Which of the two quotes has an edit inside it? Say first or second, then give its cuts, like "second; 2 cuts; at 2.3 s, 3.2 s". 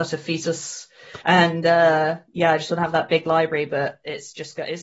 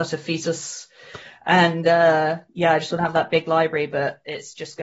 first; 1 cut; at 1.2 s